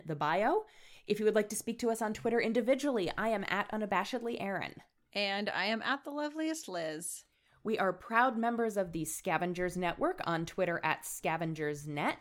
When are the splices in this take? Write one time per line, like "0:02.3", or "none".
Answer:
none

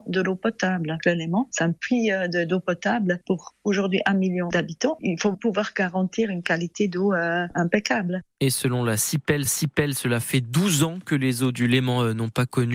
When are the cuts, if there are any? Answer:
0:05.3
0:09.5

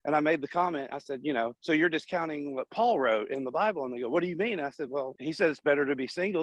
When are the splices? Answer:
none

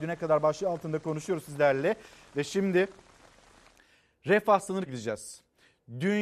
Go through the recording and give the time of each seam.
0:04.9

